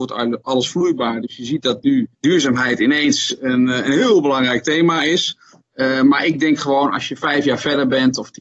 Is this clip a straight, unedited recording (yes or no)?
no